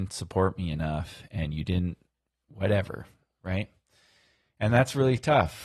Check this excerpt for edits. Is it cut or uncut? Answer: uncut